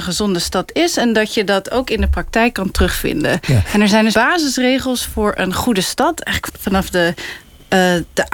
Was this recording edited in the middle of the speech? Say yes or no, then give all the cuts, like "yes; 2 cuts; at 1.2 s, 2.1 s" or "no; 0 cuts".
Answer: yes; 2 cuts; at 4.1 s, 6.5 s